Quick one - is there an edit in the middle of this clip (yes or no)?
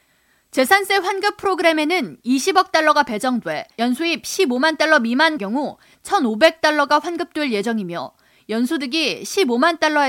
yes